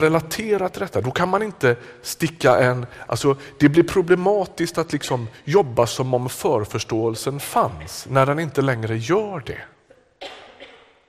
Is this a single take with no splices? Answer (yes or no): yes